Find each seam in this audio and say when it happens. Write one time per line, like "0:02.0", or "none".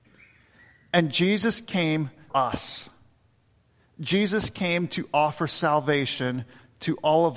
0:02.3